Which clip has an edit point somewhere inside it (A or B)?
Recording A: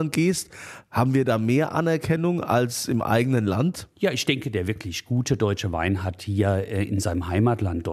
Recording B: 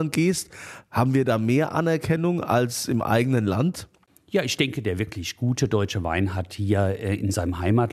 A